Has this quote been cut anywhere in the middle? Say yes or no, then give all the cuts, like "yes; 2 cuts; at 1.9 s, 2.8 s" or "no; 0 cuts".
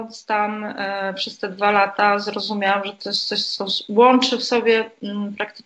no; 0 cuts